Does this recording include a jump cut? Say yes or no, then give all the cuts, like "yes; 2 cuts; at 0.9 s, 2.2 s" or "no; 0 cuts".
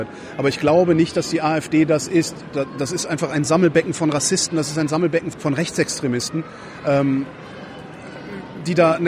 yes; 1 cut; at 5.3 s